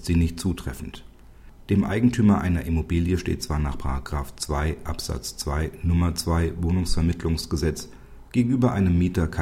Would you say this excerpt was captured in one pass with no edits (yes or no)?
yes